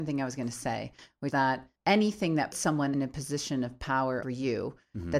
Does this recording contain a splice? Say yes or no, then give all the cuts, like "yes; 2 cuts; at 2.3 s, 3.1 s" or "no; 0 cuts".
yes; 5 cuts; at 1.3 s, 1.8 s, 2.5 s, 2.9 s, 4.2 s